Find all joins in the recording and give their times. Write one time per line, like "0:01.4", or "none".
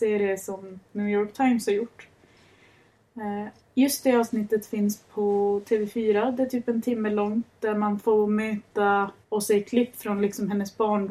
0:03.6
0:09.2